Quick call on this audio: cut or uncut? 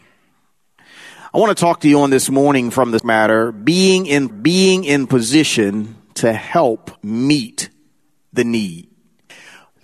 cut